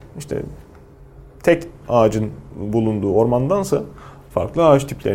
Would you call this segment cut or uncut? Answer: cut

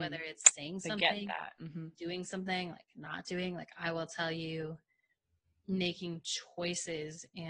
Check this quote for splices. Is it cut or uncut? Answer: uncut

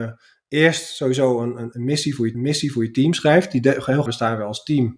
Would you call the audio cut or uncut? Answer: cut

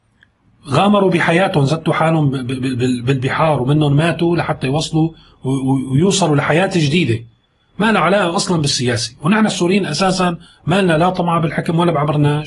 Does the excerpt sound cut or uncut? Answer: uncut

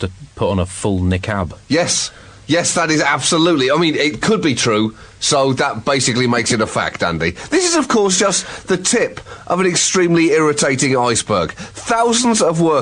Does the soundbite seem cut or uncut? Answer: uncut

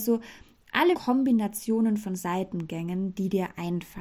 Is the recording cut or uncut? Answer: cut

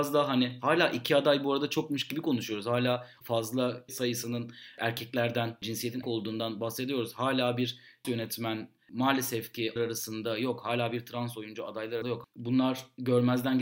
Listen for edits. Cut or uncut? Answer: cut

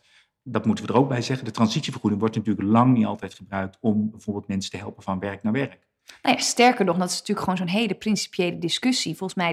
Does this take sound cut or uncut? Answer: uncut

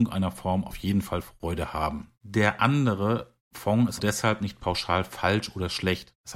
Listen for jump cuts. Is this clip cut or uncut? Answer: cut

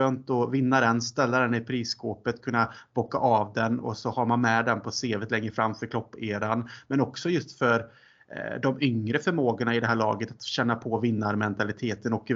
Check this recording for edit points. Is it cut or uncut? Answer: uncut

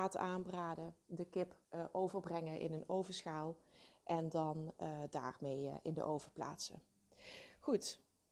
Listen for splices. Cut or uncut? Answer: cut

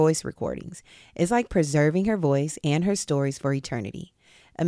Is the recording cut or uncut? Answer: uncut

